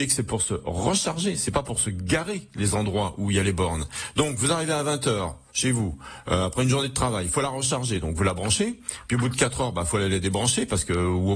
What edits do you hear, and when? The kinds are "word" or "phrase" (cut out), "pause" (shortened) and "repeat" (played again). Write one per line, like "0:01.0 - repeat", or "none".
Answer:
none